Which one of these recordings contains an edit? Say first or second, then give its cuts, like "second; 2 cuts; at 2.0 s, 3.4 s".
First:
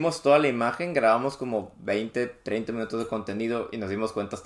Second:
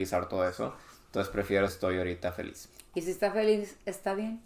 second; 1 cut; at 1.7 s